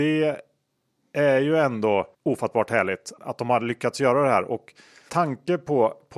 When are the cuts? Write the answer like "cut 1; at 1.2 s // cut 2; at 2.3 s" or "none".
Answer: cut 1; at 2.1 s // cut 2; at 3.2 s // cut 3; at 5.1 s